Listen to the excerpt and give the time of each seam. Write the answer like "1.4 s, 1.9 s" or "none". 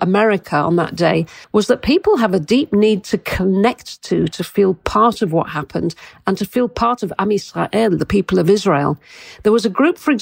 1.4 s